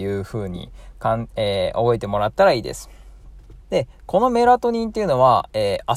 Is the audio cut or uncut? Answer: cut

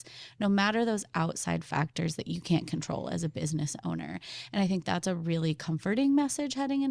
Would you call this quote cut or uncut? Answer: uncut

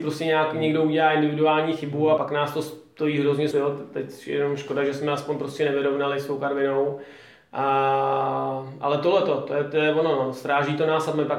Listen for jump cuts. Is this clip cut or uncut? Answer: cut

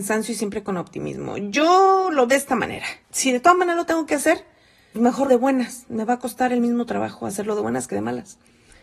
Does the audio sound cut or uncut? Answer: cut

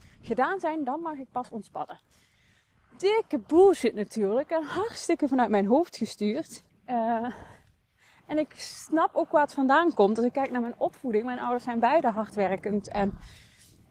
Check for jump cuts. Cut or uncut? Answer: cut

